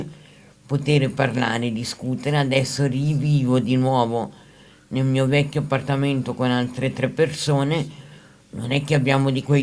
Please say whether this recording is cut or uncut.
uncut